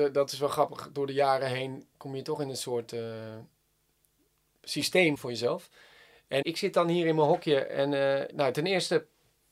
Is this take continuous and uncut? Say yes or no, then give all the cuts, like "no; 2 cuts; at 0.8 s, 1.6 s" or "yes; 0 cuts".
no; 4 cuts; at 1.9 s, 5.1 s, 6.4 s, 8.3 s